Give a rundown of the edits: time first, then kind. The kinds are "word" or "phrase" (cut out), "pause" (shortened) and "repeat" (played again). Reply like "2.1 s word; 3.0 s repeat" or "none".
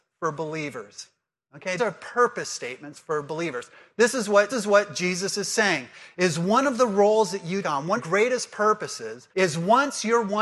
1.8 s word; 4.5 s repeat; 7.6 s word; 8.0 s phrase; 9.3 s pause